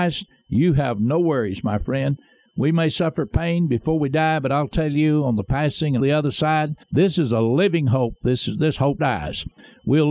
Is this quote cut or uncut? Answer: cut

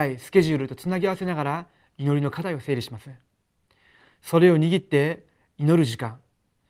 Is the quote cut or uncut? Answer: uncut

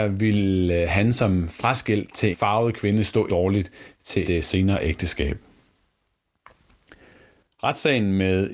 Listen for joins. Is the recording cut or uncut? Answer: cut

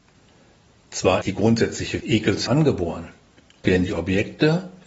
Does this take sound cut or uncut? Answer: cut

